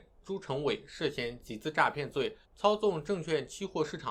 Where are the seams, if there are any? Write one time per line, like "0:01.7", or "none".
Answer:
0:02.4